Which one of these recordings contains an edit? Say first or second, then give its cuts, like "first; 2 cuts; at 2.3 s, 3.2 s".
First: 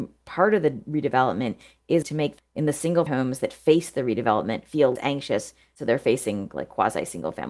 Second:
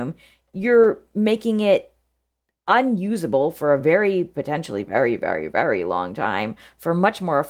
first; 4 cuts; at 2.0 s, 2.4 s, 3.1 s, 5.0 s